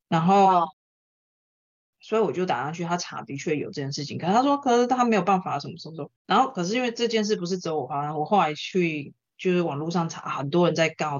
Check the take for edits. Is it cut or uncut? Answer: cut